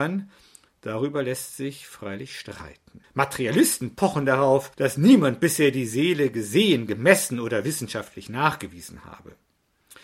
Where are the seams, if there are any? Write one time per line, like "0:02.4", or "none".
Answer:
0:03.0
0:04.7